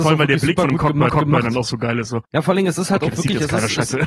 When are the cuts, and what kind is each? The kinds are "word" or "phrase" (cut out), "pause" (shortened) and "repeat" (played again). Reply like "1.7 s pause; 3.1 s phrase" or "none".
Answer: 1.1 s repeat; 2.2 s pause

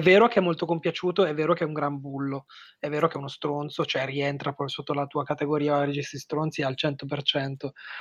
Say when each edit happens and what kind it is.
none

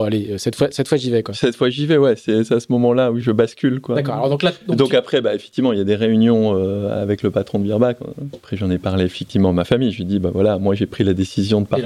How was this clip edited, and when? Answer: 3.2 s word

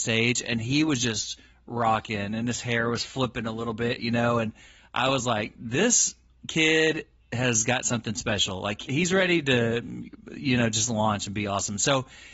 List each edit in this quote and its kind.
none

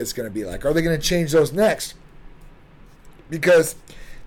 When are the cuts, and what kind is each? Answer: none

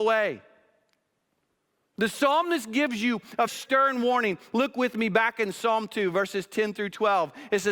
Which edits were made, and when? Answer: 3.5 s word

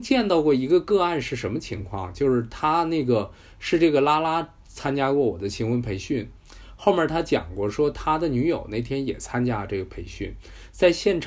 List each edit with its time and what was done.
none

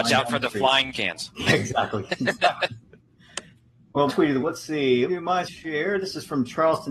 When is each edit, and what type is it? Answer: 0.9 s word; 4.1 s word; 4.4 s word; 5.1 s word; 5.5 s word

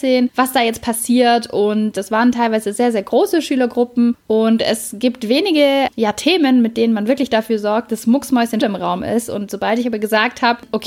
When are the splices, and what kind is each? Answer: 8.6 s word

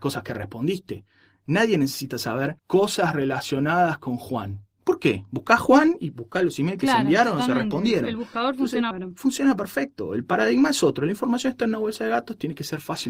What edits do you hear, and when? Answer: 2.6 s pause; 4.7 s pause; 8.9 s word

